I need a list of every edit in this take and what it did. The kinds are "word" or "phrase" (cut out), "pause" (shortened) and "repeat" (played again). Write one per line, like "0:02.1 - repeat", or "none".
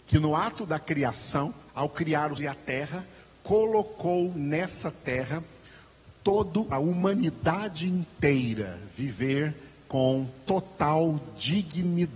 0:01.7 - pause
0:02.4 - word
0:06.7 - phrase